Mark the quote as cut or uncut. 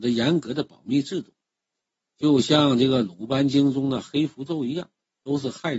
uncut